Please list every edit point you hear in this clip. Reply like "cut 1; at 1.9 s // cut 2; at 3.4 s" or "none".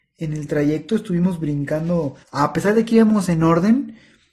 cut 1; at 2.2 s